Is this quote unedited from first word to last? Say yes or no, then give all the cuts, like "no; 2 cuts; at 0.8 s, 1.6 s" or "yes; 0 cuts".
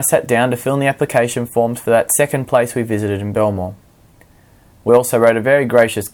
yes; 0 cuts